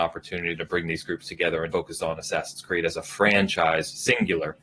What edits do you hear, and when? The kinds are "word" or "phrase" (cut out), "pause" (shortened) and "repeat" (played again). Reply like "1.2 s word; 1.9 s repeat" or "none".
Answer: 1.7 s word